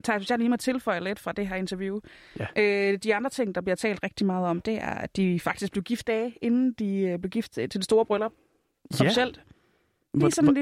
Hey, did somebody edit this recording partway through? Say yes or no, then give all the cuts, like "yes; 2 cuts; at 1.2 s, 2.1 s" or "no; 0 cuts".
yes; 1 cut; at 6.0 s